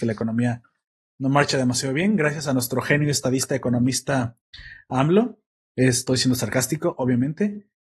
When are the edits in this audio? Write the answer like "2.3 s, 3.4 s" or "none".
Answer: none